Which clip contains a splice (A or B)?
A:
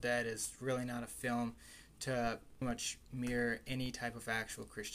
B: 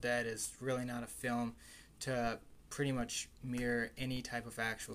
A